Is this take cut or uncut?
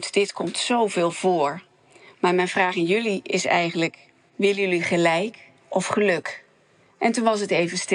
uncut